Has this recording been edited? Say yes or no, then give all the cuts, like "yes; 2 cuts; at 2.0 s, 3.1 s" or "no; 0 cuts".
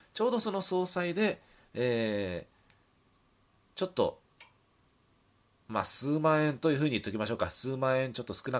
no; 0 cuts